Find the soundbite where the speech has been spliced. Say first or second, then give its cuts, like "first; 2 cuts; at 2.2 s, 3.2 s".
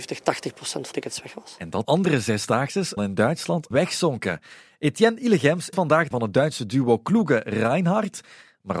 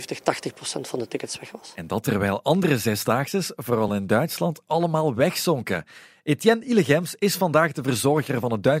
first; 6 cuts; at 0.9 s, 1.8 s, 3.0 s, 3.7 s, 5.7 s, 6.1 s